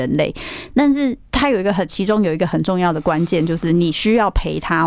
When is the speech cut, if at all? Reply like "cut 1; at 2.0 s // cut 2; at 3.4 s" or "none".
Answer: cut 1; at 1.3 s

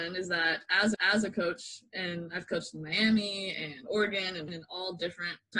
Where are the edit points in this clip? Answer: cut 1; at 0.9 s // cut 2; at 4.5 s

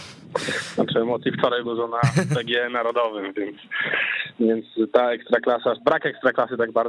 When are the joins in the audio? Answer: cut 1; at 1.6 s // cut 2; at 5.8 s

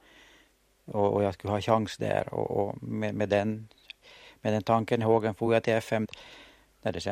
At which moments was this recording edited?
none

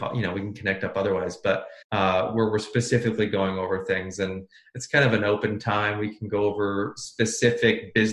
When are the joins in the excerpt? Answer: cut 1; at 1.8 s

